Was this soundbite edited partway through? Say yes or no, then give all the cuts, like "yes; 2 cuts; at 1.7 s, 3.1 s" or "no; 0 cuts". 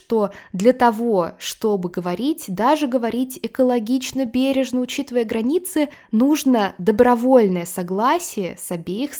no; 0 cuts